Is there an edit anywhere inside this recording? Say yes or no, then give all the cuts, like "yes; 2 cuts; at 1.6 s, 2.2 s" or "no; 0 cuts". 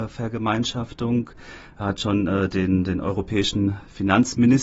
no; 0 cuts